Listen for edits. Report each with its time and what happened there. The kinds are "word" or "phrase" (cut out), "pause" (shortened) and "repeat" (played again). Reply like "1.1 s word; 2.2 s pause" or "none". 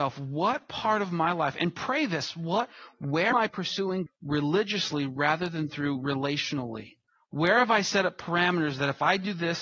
3.3 s word; 4.1 s word; 7.1 s pause